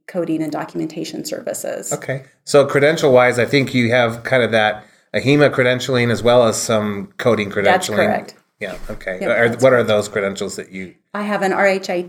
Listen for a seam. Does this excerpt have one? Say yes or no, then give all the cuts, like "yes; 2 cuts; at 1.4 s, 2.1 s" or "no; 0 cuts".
no; 0 cuts